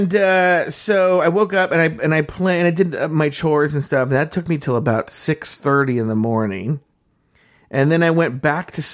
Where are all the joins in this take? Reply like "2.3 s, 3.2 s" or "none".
none